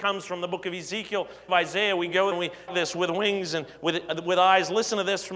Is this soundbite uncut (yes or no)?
no